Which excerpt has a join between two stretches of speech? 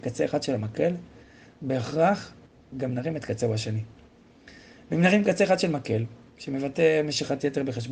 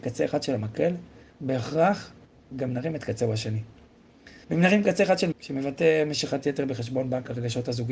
second; 3 cuts; at 1.3 s, 4.4 s, 5.3 s

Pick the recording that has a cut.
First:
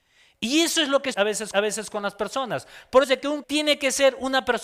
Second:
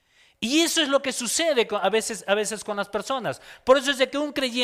first; 4 cuts; at 1.1 s, 1.5 s, 3.0 s, 3.4 s

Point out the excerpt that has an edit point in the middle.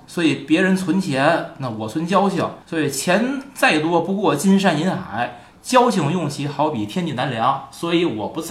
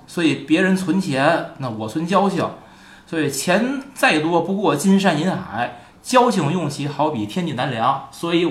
first; 1 cut; at 2.6 s

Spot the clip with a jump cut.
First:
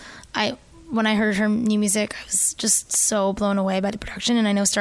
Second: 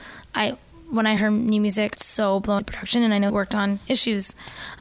second; 4 cuts; at 1.2 s, 1.9 s, 2.6 s, 3.3 s

